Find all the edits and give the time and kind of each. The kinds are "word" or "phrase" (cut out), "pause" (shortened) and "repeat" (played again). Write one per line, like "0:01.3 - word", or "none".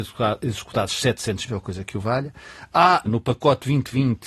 0:01.5 - word
0:03.1 - word